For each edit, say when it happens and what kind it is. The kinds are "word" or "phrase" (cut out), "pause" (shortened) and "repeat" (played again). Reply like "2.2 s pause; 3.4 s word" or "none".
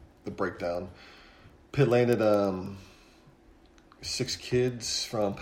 none